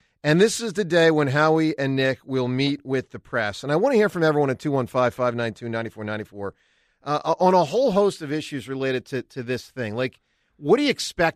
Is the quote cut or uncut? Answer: uncut